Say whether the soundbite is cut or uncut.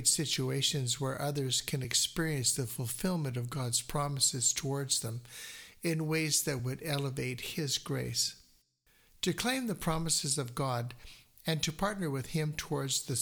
uncut